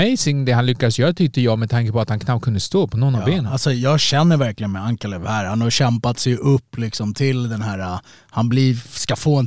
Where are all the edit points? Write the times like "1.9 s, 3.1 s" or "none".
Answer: none

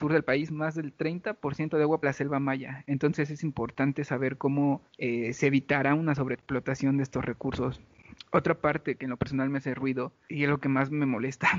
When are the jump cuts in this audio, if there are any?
2.0 s, 4.9 s

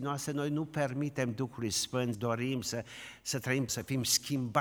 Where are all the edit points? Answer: 2.1 s, 3.7 s

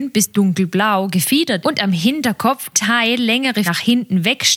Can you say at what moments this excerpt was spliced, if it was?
1.6 s, 2.7 s, 3.6 s

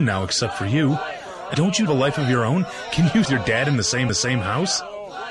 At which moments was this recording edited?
1.5 s, 1.9 s, 3.2 s, 4.1 s

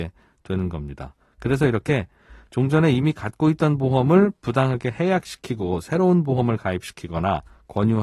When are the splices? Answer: none

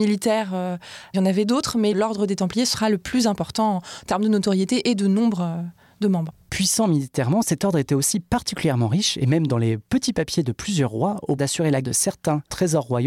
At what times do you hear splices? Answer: 11.4 s, 11.8 s

